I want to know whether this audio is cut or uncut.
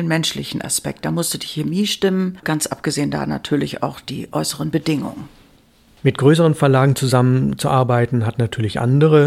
uncut